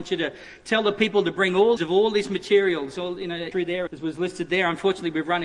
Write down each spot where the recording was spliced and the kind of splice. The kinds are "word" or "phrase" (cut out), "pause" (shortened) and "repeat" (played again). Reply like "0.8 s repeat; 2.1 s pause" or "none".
1.8 s phrase; 3.5 s word; 3.9 s word